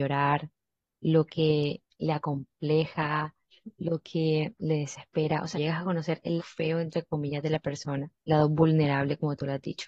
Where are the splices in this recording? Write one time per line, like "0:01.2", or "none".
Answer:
0:05.5
0:06.4
0:08.3